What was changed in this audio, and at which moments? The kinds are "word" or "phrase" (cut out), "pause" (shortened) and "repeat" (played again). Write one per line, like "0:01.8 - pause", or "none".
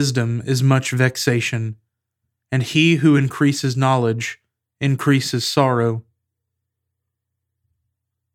none